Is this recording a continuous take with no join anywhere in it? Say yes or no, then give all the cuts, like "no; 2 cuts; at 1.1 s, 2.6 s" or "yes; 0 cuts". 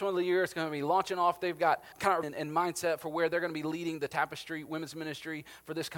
no; 2 cuts; at 1.9 s, 2.2 s